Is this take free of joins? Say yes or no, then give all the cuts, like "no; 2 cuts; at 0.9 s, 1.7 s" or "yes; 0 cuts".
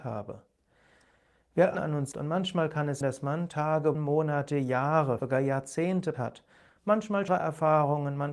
no; 7 cuts; at 1.7 s, 2.1 s, 3.0 s, 3.9 s, 5.2 s, 6.1 s, 7.3 s